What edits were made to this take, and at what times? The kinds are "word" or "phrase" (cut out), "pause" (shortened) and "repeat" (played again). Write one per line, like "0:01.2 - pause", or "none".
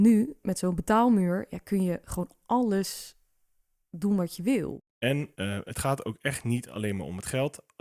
0:05.3 - pause